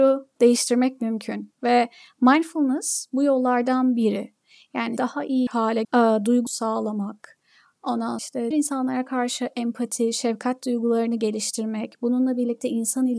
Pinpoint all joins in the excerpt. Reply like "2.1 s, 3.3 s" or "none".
5.0 s, 5.5 s, 5.8 s, 6.5 s, 8.2 s, 8.5 s